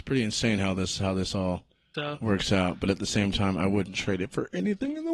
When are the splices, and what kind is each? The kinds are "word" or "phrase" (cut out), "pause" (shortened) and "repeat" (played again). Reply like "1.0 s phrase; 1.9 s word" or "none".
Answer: 1.9 s word